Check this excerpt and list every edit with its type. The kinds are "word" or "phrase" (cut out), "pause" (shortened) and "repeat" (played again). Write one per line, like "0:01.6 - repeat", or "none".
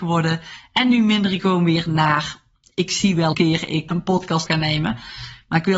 0:01.4 - word
0:03.3 - word
0:03.9 - word
0:04.5 - word